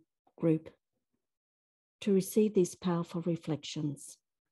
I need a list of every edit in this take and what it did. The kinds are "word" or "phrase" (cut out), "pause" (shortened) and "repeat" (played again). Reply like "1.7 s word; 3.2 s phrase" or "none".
none